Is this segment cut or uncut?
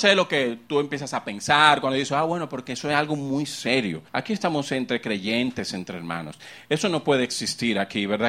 cut